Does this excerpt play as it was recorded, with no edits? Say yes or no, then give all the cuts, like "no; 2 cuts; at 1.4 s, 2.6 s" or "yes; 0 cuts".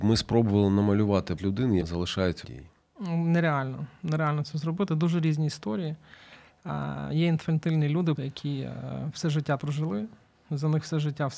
no; 5 cuts; at 1.4 s, 1.8 s, 2.4 s, 8.2 s, 9.6 s